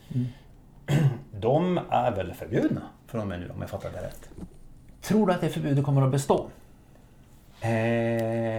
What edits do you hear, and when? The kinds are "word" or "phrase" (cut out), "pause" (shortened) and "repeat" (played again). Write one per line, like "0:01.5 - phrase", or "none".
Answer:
none

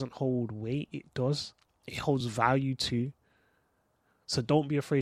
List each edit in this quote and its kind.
none

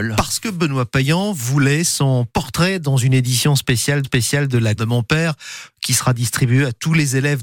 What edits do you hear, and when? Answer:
0:04.0 - repeat
0:04.8 - word

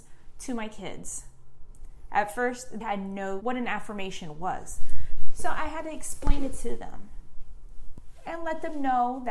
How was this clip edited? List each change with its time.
0:02.8 - word
0:03.4 - word

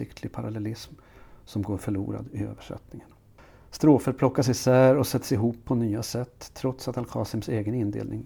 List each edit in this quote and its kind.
none

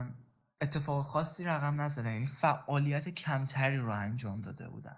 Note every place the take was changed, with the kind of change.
none

